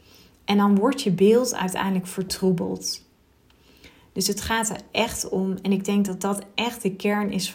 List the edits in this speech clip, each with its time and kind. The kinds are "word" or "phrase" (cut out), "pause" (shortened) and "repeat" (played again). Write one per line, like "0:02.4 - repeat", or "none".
none